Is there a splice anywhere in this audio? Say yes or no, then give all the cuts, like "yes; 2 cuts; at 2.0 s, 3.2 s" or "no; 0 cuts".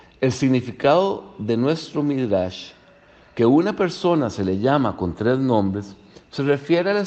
no; 0 cuts